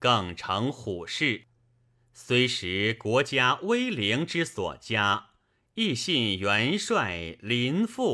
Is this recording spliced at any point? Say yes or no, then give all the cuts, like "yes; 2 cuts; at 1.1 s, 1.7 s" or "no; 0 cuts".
no; 0 cuts